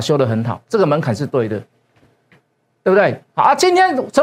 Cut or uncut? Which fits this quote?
uncut